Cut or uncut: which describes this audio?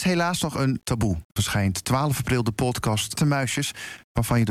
cut